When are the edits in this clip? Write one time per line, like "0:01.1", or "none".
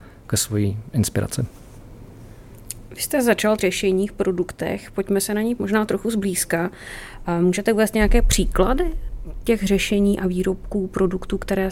0:03.6
0:05.6